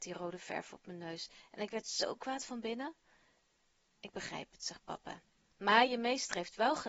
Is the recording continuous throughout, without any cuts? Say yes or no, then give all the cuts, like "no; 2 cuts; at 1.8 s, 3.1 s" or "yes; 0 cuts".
yes; 0 cuts